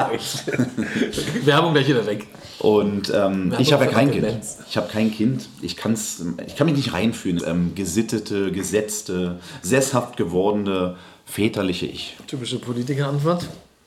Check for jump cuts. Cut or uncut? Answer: cut